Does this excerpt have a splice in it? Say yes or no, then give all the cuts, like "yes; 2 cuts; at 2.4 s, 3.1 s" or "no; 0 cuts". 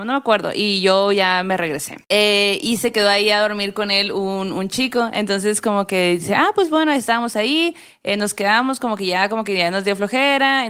yes; 1 cut; at 2.0 s